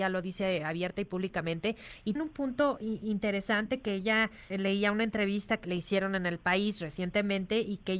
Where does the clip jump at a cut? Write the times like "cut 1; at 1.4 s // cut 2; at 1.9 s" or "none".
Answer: cut 1; at 2.2 s // cut 2; at 4.5 s // cut 3; at 5.6 s